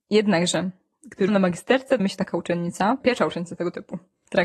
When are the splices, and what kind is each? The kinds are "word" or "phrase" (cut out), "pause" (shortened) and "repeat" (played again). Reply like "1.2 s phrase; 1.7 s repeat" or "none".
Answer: 1.3 s word; 2.0 s word; 3.0 s phrase

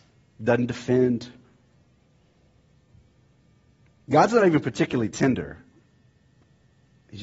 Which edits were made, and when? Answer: none

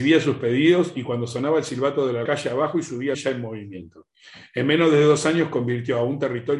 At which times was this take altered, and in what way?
2.3 s phrase; 3.1 s phrase

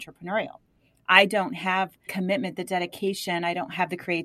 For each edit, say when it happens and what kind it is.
2.1 s word

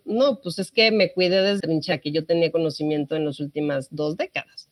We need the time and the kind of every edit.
1.6 s word; 1.9 s word

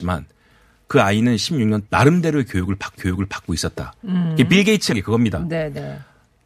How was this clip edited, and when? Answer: 1.9 s word; 3.0 s repeat; 4.9 s word

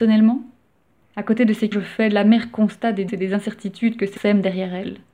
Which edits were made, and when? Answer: 1.7 s word; 3.1 s word; 4.2 s word

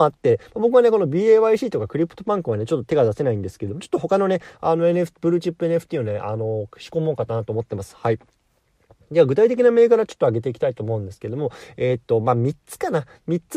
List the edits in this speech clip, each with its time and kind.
none

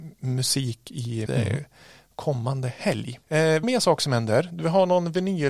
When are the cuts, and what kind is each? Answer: 1.3 s word; 3.2 s pause; 3.6 s word

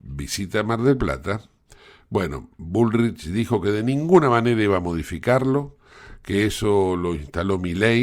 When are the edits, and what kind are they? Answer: none

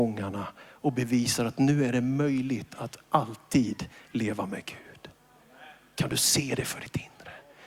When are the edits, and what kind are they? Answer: none

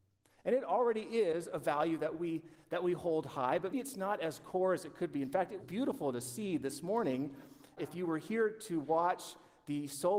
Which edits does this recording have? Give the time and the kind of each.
3.7 s word; 5.6 s word; 7.8 s word

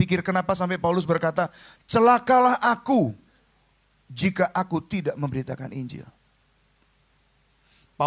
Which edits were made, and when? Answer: none

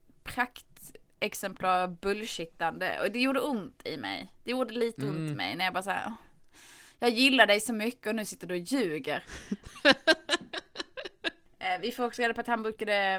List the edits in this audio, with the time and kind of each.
none

